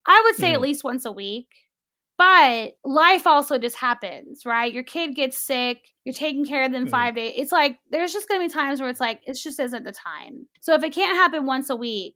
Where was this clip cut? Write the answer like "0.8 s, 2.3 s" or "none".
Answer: 2.8 s, 6.0 s, 10.5 s